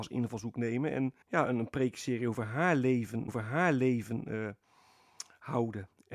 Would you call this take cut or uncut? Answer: cut